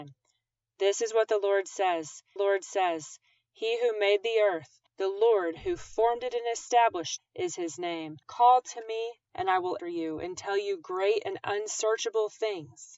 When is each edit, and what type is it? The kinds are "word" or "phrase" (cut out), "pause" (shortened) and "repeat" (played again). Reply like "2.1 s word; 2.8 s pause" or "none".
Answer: 2.4 s repeat; 4.9 s pause; 7.2 s phrase; 8.2 s pause; 9.2 s pause; 9.8 s word